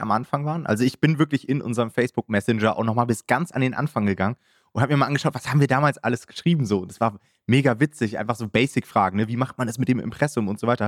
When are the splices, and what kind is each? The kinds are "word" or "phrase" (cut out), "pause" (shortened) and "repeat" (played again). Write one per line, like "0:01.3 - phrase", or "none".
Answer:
none